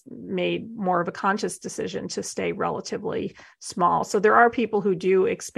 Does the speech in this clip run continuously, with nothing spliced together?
yes; 0 cuts

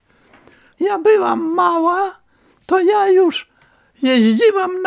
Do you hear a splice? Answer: no; 0 cuts

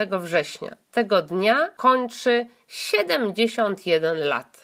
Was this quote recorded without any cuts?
yes; 0 cuts

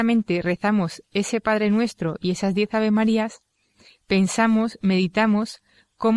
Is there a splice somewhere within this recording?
no; 0 cuts

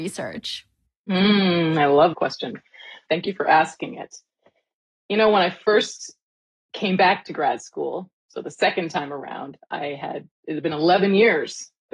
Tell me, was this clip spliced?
yes; 3 cuts; at 2.1 s, 3.1 s, 10.4 s

